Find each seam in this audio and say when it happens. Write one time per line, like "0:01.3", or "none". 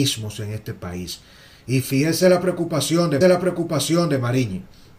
0:03.2